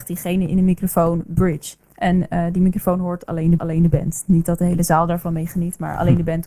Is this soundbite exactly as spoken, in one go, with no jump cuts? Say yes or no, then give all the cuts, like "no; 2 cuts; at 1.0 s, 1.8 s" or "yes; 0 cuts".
no; 2 cuts; at 1.8 s, 3.6 s